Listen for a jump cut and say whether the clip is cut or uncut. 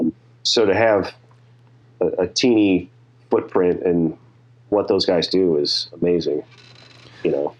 uncut